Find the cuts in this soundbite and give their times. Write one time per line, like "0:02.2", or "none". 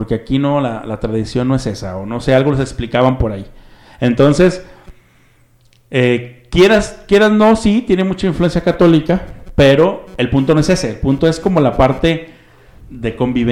none